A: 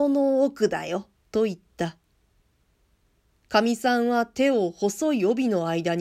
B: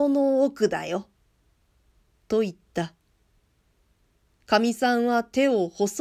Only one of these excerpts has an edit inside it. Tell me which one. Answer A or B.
A